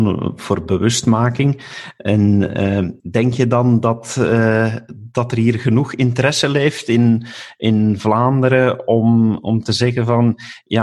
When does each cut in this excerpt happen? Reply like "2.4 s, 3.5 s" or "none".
3.0 s